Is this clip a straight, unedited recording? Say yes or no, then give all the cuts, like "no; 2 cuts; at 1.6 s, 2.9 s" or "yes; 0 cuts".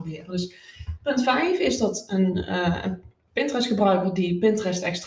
yes; 0 cuts